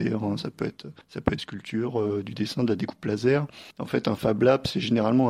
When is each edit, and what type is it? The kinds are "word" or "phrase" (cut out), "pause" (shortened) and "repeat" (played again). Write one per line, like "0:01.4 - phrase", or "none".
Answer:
0:01.0 - pause
0:01.4 - phrase
0:03.7 - pause